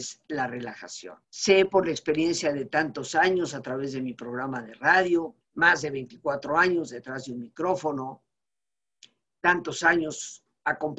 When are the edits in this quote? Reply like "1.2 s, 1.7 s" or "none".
1.2 s, 5.4 s